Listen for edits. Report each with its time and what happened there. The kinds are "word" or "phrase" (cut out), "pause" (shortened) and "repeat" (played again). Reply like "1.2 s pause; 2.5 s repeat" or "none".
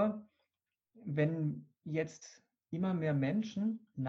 none